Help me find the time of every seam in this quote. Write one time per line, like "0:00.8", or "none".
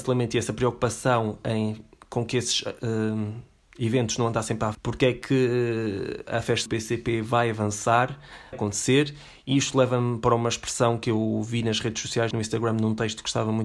0:04.7
0:06.7
0:08.5
0:12.3